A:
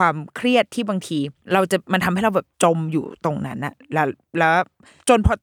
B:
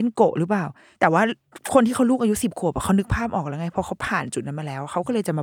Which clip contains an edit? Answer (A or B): A